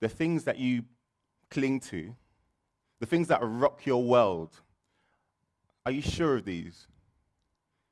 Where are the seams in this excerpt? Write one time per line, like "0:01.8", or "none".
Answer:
none